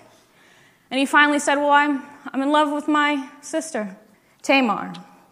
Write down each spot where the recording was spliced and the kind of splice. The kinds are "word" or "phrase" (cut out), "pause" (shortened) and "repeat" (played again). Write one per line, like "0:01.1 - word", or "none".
0:04.1 - pause

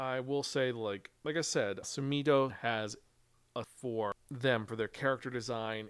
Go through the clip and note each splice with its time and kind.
0:01.2 - pause
0:01.8 - word
0:02.5 - word
0:03.6 - phrase

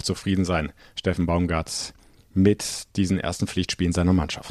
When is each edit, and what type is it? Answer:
none

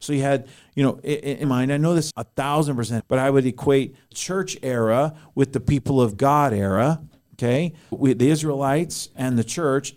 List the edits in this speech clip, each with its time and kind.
0:01.4 - word
0:02.1 - word
0:03.0 - word
0:04.1 - word
0:07.9 - word

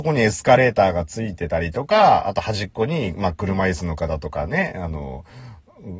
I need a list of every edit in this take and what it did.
none

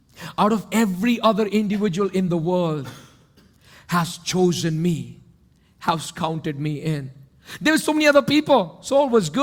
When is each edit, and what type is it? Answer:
none

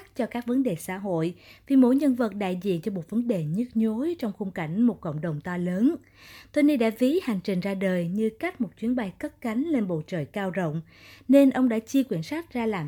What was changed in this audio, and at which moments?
none

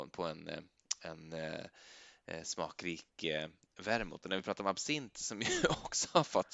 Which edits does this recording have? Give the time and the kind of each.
none

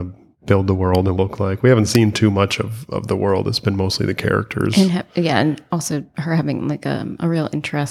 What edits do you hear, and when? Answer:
0:01.2 - phrase

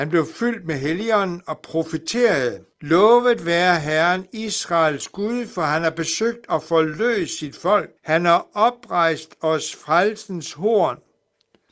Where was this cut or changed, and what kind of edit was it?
0:02.7 - pause
0:08.0 - pause

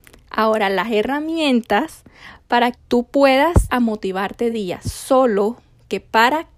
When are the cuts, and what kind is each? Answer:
0:02.7 - word
0:03.7 - word
0:04.5 - word

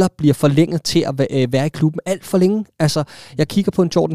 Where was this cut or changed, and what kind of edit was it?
none

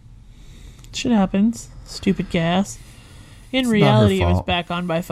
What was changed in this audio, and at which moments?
none

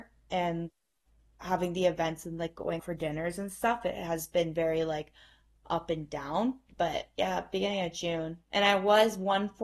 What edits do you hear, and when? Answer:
0:02.8 - word
0:06.7 - pause

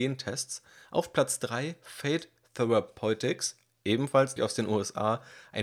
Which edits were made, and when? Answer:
0:04.4 - word

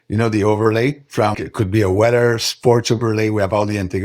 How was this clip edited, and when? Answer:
0:01.3 - word

